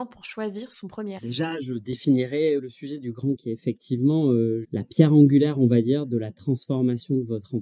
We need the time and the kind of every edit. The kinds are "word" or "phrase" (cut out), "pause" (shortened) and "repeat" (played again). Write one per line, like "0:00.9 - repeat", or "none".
0:01.2 - word
0:02.6 - word
0:03.4 - word
0:04.6 - word

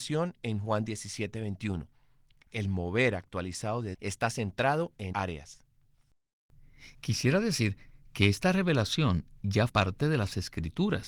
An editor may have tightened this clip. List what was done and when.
0:03.9 - word
0:05.1 - phrase
0:09.7 - word

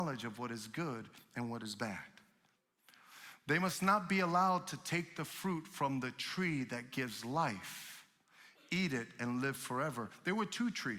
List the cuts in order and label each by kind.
none

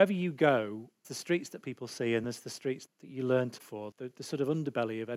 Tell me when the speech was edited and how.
0:01.0 - word
0:01.6 - word
0:02.2 - word
0:02.9 - word
0:03.6 - word
0:03.9 - word

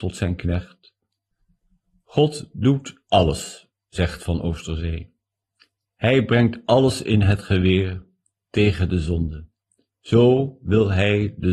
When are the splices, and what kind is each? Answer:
0:01.3 - pause

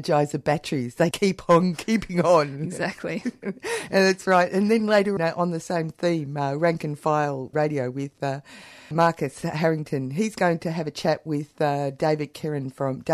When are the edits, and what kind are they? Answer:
0:01.1 - word
0:05.2 - word
0:07.5 - word
0:08.9 - word

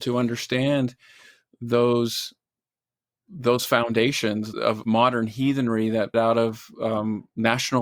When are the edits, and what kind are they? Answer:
0:04.5 - word
0:04.8 - word
0:06.1 - word

